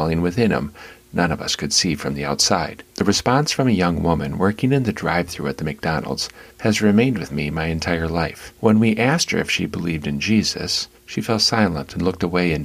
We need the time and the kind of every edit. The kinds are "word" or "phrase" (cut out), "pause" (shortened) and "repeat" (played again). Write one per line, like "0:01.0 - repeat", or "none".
0:02.9 - pause
0:06.5 - pause
0:08.6 - pause
0:11.0 - pause